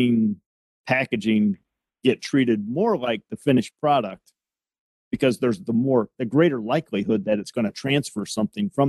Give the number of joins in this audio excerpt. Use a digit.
0